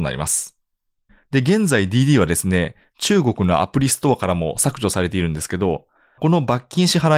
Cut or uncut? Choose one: uncut